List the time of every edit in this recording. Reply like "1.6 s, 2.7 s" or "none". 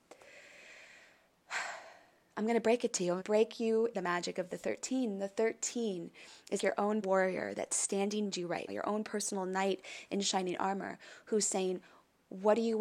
3.2 s, 3.9 s, 6.6 s, 7.0 s, 8.3 s, 8.7 s